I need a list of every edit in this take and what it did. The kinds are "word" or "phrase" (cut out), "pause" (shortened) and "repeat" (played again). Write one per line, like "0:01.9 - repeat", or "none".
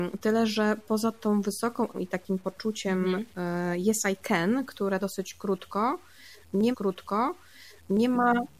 0:01.9 - word
0:05.0 - word
0:06.7 - repeat